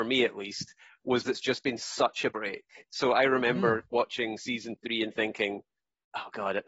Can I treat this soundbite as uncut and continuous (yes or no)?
no